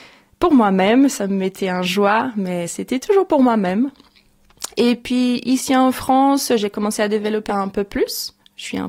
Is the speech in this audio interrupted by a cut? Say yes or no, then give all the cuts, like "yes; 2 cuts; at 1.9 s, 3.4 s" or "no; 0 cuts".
yes; 2 cuts; at 4.7 s, 7.5 s